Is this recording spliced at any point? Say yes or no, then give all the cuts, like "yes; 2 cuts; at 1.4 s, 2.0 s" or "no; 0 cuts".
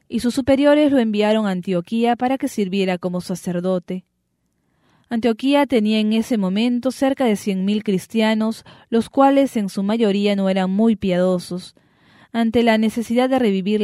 no; 0 cuts